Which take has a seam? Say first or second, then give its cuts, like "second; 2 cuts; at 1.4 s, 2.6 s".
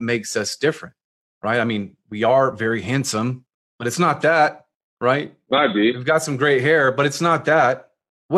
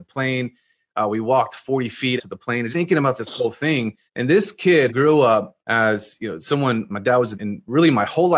second; 7 cuts; at 2.2 s, 2.7 s, 4.1 s, 4.9 s, 5.6 s, 6.9 s, 7.3 s